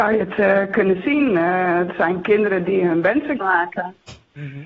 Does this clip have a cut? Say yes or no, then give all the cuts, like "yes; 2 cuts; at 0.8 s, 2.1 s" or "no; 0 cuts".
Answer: yes; 1 cut; at 3.4 s